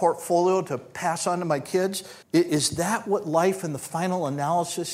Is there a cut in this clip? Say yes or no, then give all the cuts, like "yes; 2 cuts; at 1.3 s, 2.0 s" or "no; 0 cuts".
yes; 1 cut; at 2.2 s